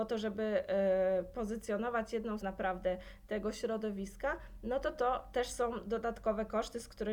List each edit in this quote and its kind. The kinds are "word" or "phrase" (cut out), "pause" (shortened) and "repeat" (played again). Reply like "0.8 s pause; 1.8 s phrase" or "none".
2.4 s phrase